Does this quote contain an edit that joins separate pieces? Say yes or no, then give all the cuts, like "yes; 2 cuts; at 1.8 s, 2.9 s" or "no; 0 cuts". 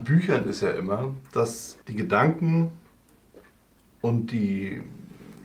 yes; 1 cut; at 1.8 s